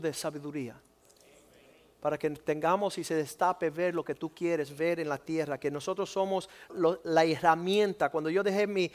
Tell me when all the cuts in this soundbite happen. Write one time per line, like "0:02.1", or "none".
0:06.7